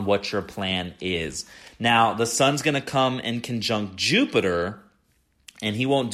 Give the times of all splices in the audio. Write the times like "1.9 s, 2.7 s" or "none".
none